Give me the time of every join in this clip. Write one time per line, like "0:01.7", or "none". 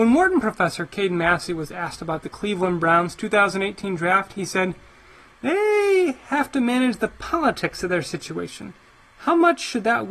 none